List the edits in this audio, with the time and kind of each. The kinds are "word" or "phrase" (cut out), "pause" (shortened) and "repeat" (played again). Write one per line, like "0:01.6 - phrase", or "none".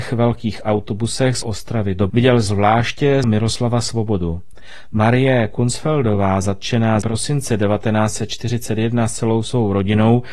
0:01.4 - word
0:02.1 - word
0:03.2 - word
0:07.0 - word